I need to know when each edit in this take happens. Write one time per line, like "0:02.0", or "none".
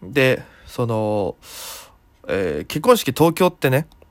none